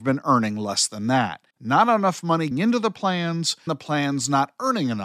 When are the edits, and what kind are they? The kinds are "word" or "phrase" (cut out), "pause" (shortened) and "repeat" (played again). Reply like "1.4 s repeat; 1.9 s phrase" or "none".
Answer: 1.5 s pause; 2.5 s word; 3.7 s word